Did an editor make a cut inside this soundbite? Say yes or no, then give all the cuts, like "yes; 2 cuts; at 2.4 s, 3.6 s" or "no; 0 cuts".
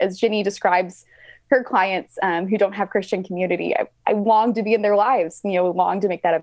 no; 0 cuts